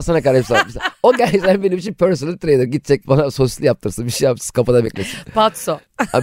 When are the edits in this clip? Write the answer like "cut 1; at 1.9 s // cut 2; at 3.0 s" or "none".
cut 1; at 3.1 s